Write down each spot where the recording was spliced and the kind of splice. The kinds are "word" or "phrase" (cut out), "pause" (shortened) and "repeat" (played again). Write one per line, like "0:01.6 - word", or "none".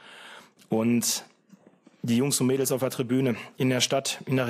none